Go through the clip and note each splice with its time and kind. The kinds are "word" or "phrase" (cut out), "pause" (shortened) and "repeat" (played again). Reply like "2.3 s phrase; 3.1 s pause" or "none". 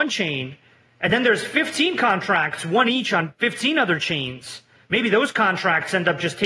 none